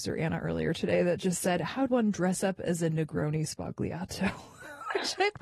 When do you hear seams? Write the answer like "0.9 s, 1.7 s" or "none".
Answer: 1.9 s